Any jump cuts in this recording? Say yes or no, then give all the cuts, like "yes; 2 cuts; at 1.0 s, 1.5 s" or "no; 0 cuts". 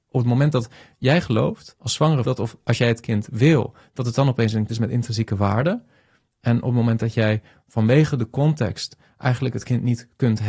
yes; 2 cuts; at 2.2 s, 4.7 s